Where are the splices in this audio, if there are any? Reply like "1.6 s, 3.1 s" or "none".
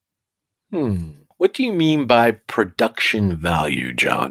none